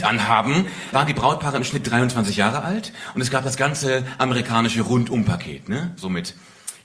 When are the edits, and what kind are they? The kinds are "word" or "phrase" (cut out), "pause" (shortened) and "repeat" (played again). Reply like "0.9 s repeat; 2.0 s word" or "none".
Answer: 0.9 s word

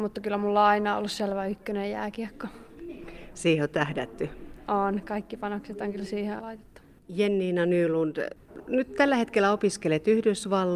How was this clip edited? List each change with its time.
6.4 s word

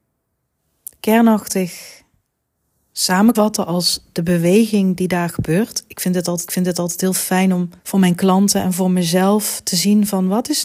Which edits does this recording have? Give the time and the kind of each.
3.3 s word; 6.5 s repeat; 7.8 s pause

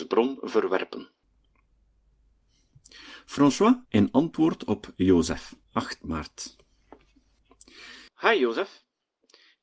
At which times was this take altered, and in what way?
3.8 s pause; 5.6 s pause; 8.1 s pause

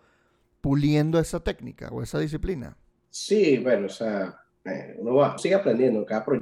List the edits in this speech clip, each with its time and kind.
3.0 s pause; 5.4 s word

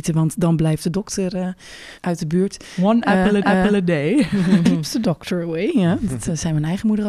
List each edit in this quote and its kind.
2.0 s pause; 3.4 s repeat

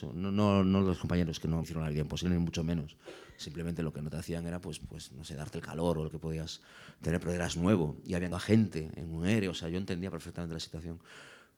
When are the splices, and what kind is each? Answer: 1.6 s word; 4.8 s word; 6.1 s word; 8.3 s word

